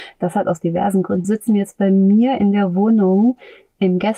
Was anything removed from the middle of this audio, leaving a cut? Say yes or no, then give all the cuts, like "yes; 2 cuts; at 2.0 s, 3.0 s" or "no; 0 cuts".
yes; 1 cut; at 1.2 s